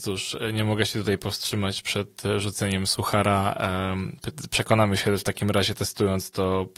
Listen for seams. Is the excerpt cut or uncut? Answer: uncut